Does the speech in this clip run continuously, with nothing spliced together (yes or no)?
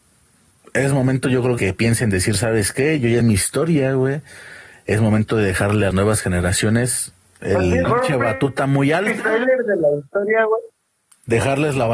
no